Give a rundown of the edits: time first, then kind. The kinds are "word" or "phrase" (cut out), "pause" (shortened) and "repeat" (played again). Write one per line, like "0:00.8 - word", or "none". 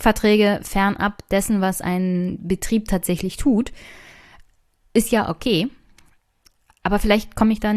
none